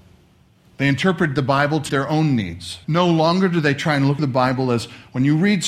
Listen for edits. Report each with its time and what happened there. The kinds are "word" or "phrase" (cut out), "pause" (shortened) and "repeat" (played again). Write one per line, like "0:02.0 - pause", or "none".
0:01.9 - word
0:02.8 - pause
0:04.2 - word